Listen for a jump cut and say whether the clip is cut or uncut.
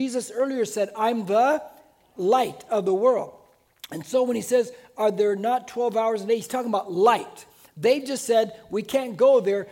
uncut